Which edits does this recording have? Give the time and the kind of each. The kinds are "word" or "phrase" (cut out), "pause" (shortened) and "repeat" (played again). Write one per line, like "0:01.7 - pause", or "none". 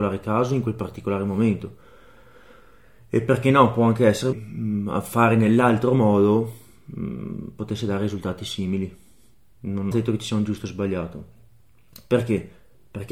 0:04.3 - phrase
0:09.9 - phrase